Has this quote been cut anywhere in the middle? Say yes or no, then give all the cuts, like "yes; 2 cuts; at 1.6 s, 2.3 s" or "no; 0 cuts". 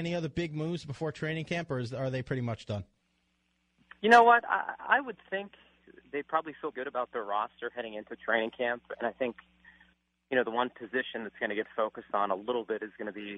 yes; 1 cut; at 6.7 s